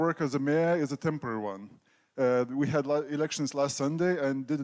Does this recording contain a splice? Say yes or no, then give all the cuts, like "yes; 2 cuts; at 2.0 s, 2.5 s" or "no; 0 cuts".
no; 0 cuts